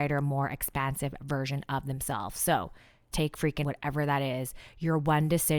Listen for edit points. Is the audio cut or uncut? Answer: cut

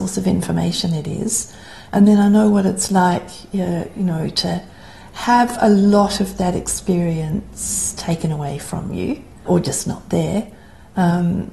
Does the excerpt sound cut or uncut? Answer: cut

